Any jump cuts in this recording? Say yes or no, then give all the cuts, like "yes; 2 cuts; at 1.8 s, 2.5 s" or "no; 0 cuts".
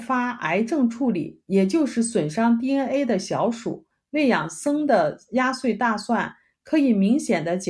no; 0 cuts